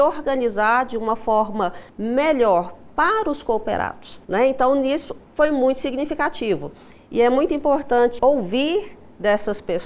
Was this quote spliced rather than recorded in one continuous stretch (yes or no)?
yes